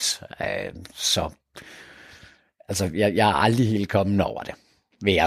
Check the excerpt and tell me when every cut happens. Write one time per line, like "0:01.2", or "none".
none